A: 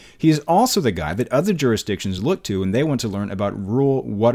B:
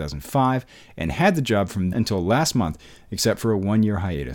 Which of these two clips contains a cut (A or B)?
B